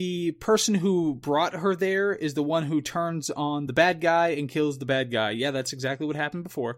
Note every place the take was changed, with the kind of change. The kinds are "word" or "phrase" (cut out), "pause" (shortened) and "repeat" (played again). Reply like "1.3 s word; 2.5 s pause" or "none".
none